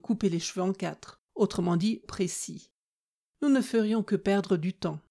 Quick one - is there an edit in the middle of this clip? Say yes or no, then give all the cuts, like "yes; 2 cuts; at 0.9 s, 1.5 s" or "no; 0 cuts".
yes; 2 cuts; at 1.3 s, 2.0 s